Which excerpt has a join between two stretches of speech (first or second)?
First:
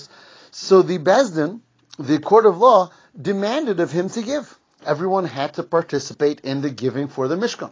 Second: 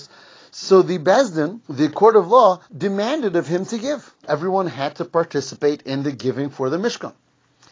second